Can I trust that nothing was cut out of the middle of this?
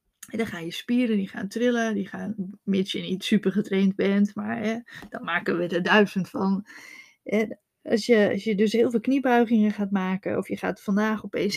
yes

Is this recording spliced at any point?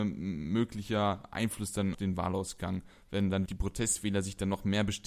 yes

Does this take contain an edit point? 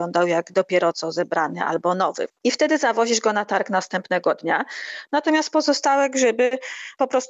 yes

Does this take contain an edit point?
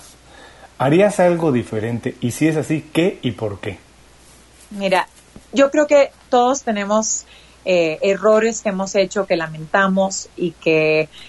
no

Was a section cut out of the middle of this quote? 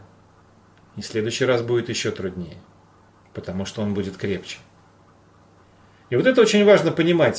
no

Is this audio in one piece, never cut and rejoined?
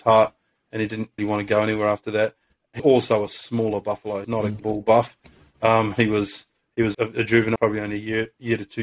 no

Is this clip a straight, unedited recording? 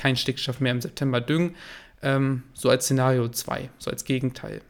yes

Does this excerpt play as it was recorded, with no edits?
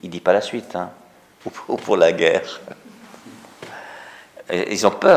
yes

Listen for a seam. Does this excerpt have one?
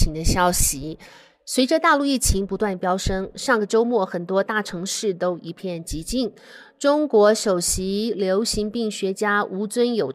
no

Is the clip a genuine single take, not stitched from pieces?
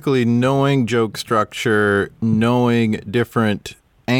yes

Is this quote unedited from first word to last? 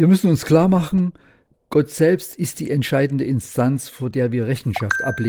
yes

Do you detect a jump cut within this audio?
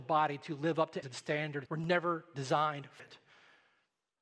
yes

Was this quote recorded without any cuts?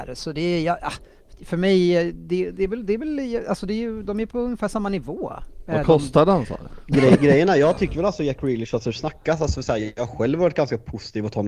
yes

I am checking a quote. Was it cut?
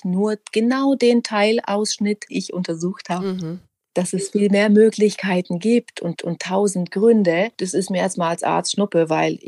yes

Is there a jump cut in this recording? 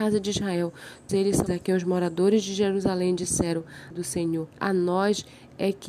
yes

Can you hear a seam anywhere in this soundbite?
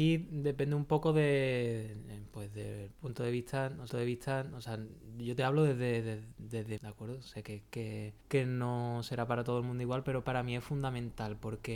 yes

